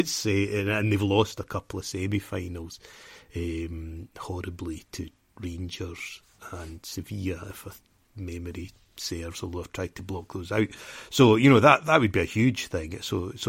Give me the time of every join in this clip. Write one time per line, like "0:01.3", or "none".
none